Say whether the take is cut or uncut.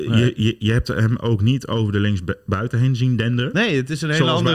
uncut